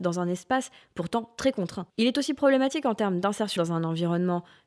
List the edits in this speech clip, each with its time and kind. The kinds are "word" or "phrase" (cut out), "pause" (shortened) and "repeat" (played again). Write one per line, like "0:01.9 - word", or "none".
0:01.9 - pause
0:03.6 - word